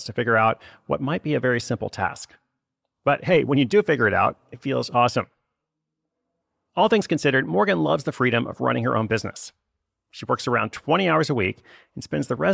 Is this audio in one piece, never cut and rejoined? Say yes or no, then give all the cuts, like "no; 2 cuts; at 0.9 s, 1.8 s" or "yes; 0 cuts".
yes; 0 cuts